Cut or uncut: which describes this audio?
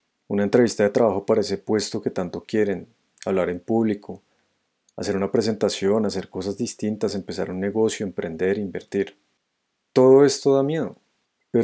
uncut